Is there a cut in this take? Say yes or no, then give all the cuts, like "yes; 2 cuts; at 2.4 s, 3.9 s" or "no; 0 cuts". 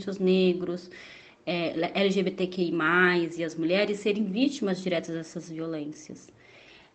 no; 0 cuts